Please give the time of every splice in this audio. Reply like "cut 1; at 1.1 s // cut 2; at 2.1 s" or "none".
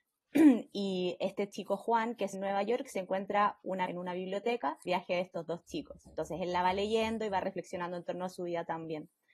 cut 1; at 2.3 s // cut 2; at 3.9 s // cut 3; at 4.9 s